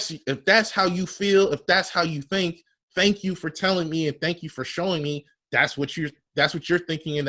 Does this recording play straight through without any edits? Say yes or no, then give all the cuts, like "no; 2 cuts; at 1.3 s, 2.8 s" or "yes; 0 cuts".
yes; 0 cuts